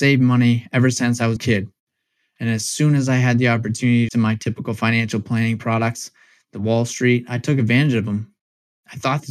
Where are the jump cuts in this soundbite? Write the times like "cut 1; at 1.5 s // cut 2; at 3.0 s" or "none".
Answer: cut 1; at 1.4 s // cut 2; at 4.1 s